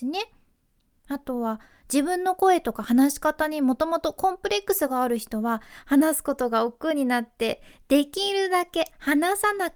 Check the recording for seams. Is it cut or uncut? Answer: uncut